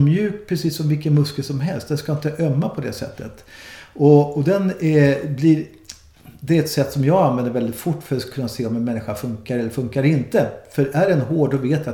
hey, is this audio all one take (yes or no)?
yes